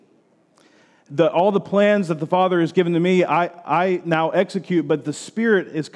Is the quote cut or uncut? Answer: uncut